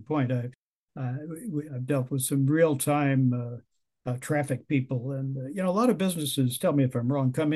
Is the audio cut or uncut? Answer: uncut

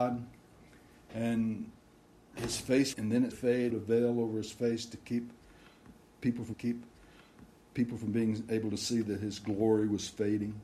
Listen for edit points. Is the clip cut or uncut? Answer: cut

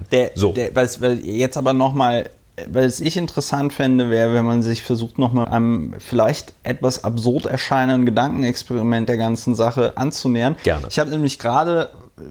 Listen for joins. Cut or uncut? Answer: cut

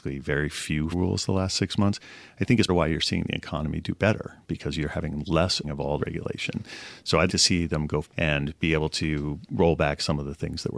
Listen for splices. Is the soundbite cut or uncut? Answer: cut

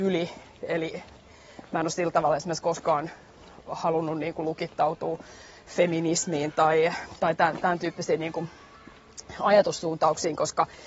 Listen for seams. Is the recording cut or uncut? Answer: uncut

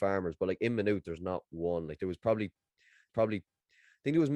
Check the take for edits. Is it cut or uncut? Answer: cut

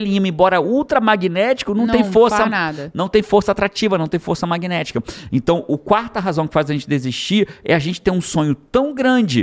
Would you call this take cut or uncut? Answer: uncut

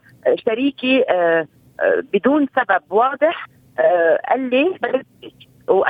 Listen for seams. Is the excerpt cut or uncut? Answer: uncut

